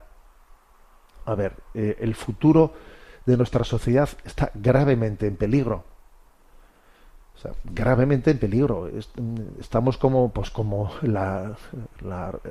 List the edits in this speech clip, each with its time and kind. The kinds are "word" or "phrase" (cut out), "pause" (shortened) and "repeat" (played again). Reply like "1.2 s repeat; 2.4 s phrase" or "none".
none